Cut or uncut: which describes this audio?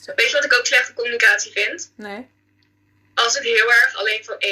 uncut